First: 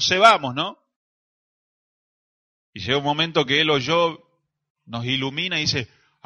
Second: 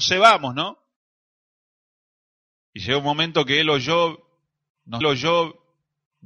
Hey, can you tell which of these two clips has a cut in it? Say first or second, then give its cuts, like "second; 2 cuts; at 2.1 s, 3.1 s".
second; 1 cut; at 5.0 s